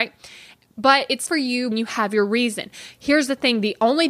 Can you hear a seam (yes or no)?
yes